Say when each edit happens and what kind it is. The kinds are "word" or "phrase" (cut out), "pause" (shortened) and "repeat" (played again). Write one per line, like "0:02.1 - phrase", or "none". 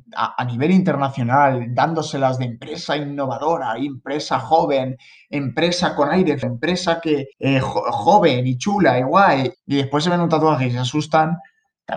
0:06.4 - word
0:07.3 - pause
0:09.5 - word